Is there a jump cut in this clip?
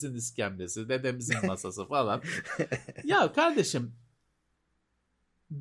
no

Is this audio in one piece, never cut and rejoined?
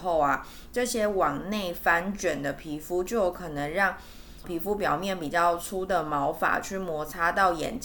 no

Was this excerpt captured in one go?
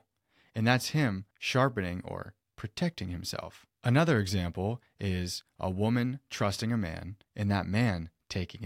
no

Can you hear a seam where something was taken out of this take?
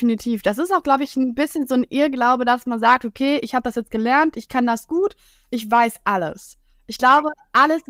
no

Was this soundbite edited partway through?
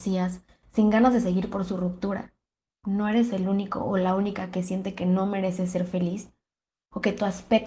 no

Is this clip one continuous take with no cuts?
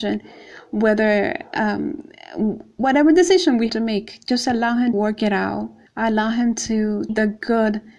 no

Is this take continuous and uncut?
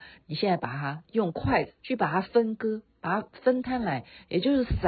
no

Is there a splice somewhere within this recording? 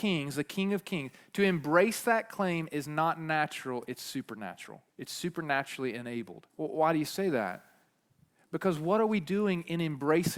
yes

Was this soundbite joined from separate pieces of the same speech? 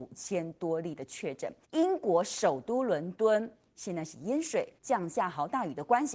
yes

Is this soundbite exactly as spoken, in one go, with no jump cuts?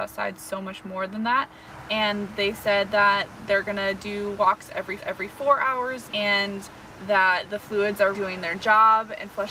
no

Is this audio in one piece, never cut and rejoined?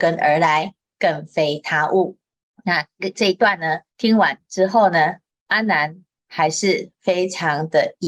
no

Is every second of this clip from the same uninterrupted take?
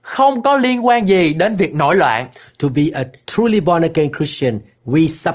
yes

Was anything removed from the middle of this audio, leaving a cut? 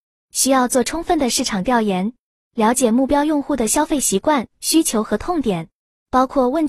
no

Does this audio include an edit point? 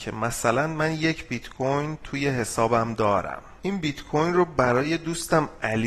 yes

